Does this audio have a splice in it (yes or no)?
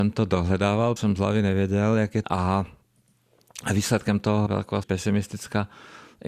yes